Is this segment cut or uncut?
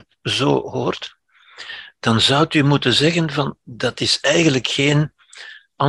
uncut